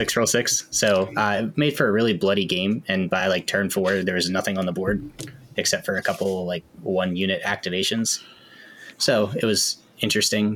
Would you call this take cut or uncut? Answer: uncut